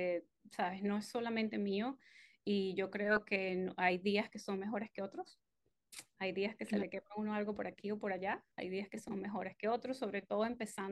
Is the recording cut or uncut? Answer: uncut